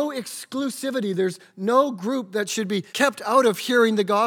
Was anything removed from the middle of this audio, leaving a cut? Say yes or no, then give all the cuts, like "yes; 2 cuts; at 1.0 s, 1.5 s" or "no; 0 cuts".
yes; 1 cut; at 2.9 s